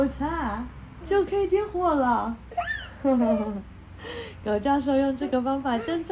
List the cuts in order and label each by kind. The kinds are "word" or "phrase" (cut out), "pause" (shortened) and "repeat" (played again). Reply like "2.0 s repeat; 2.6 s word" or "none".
1.0 s word